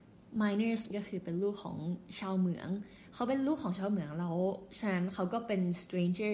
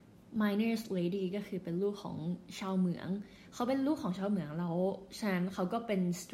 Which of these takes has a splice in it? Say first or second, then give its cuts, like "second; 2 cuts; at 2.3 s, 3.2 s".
first; 1 cut; at 0.9 s